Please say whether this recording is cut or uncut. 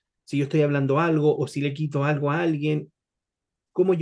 uncut